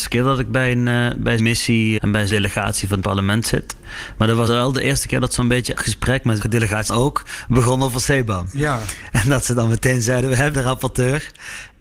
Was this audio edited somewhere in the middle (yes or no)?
yes